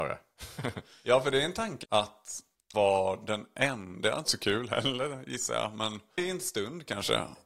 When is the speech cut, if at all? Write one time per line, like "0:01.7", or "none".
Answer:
0:01.8
0:02.7
0:04.2
0:06.2